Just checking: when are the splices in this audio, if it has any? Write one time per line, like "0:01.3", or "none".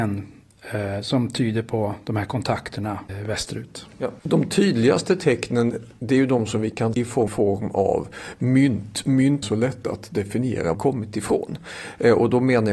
0:03.1
0:04.2
0:06.9
0:07.3
0:09.4
0:10.7